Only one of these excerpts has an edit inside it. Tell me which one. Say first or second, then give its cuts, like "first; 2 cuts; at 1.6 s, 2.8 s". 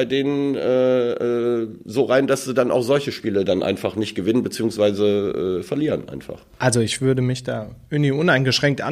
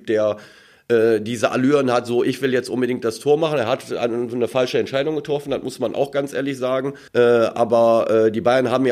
second; 1 cut; at 7.1 s